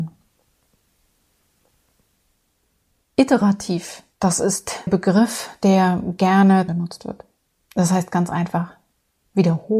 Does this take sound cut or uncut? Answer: cut